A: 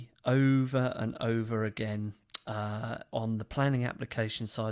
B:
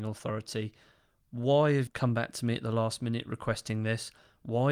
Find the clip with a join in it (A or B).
B